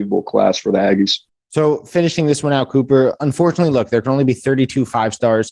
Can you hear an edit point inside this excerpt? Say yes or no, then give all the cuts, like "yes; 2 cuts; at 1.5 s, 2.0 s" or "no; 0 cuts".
no; 0 cuts